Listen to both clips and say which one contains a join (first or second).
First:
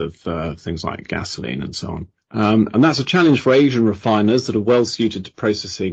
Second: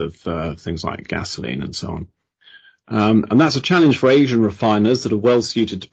first